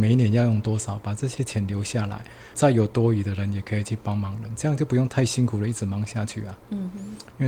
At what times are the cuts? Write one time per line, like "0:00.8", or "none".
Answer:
0:02.5